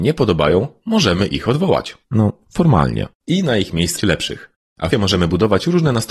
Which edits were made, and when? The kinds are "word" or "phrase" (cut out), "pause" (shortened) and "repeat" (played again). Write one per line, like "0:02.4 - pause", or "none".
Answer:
0:02.0 - pause
0:03.1 - pause
0:04.0 - word
0:04.9 - word